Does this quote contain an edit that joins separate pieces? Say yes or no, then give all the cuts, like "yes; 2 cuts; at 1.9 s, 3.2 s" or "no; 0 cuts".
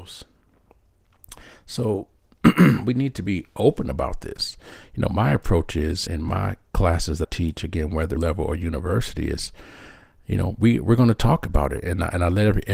yes; 3 cuts; at 6.1 s, 7.2 s, 8.2 s